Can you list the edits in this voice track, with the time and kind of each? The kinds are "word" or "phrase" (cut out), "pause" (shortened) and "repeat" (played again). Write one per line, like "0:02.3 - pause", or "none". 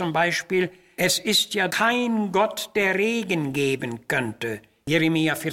0:01.7 - word